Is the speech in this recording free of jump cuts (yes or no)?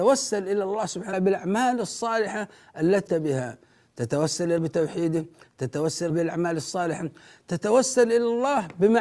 no